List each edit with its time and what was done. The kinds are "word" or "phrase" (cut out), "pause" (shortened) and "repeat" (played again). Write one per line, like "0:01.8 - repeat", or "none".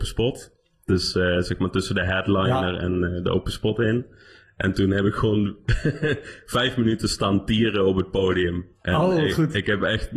none